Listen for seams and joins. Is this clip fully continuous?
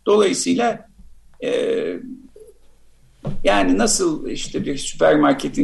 yes; 0 cuts

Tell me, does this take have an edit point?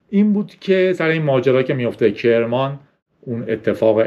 no; 0 cuts

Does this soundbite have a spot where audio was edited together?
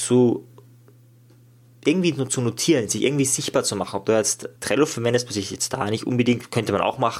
yes; 1 cut; at 4.6 s

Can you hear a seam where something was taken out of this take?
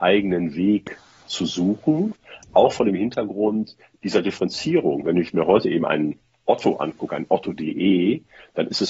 no; 0 cuts

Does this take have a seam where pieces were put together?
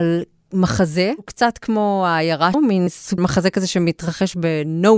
yes; 3 cuts; at 2.5 s, 2.9 s, 3.2 s

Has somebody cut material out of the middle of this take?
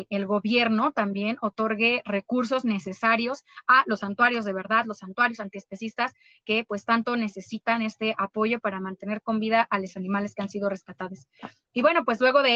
no; 0 cuts

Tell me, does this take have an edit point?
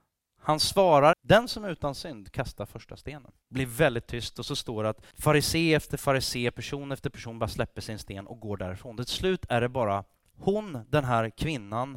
yes; 3 cuts; at 1.1 s, 3.4 s, 5.1 s

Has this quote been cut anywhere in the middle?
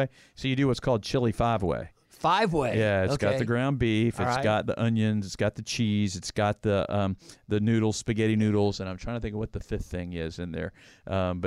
no; 0 cuts

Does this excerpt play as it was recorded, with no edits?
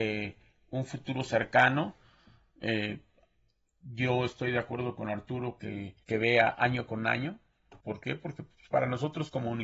no; 2 cuts; at 6.0 s, 7.8 s

